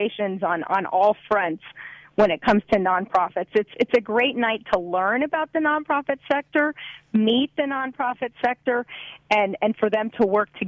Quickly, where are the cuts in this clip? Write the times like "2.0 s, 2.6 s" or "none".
none

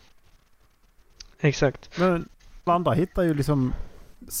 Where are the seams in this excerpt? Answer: 2.7 s

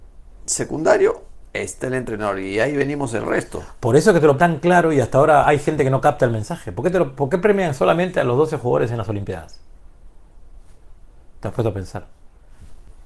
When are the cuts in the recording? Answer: 4.4 s

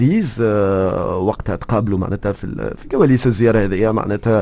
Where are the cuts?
none

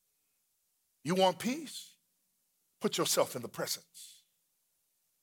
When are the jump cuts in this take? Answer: none

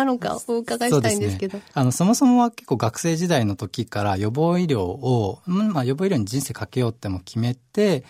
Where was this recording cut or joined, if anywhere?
1.7 s

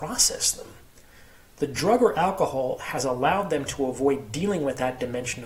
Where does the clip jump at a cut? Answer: none

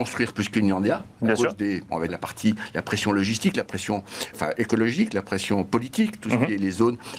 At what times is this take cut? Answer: 2.1 s, 4.3 s

